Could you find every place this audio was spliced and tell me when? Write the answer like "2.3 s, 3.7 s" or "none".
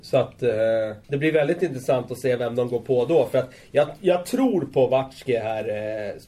1.0 s